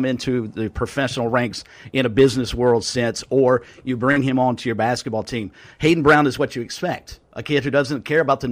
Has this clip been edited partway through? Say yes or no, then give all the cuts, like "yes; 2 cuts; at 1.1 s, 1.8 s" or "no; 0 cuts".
no; 0 cuts